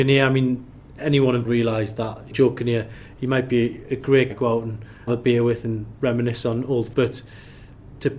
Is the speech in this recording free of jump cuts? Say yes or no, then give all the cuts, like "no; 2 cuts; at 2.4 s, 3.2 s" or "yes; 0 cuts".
no; 5 cuts; at 1.5 s, 2.3 s, 4.3 s, 5.1 s, 6.9 s